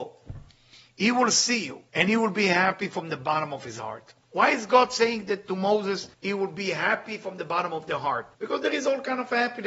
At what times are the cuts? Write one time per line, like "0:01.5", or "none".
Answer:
0:01.9
0:04.2
0:06.1
0:08.3